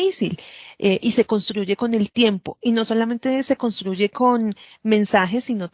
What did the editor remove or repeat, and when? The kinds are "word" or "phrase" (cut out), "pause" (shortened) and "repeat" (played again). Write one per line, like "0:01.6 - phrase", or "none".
none